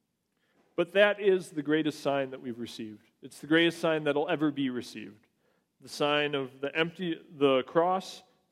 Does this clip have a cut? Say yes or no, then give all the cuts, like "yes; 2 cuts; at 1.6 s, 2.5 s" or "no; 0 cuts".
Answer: no; 0 cuts